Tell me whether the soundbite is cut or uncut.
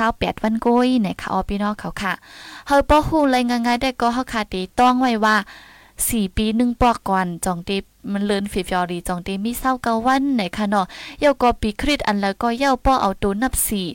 uncut